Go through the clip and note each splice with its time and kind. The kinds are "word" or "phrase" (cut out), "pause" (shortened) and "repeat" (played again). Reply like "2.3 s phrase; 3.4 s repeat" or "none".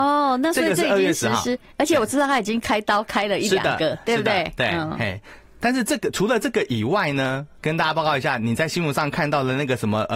7.6 s word